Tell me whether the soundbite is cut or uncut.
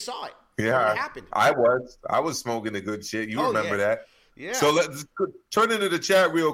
uncut